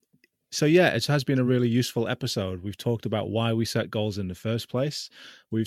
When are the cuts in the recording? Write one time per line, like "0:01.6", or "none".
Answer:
none